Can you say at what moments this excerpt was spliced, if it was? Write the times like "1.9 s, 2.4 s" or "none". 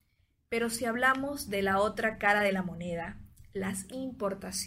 none